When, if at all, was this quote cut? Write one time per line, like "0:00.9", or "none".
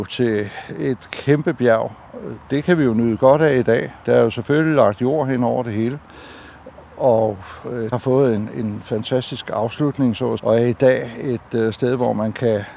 0:04.0
0:07.9
0:10.4